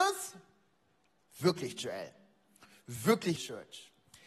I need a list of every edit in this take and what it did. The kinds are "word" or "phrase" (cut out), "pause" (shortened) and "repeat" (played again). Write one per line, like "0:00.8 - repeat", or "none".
0:03.4 - word